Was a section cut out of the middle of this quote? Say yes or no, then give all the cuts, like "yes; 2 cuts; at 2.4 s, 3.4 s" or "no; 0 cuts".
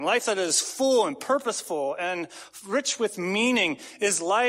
no; 0 cuts